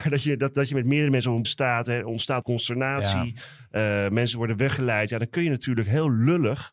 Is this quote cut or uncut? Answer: cut